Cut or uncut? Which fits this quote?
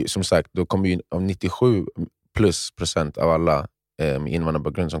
uncut